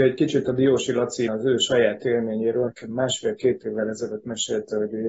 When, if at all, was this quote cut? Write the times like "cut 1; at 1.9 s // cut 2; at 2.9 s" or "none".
cut 1; at 1.3 s // cut 2; at 2.7 s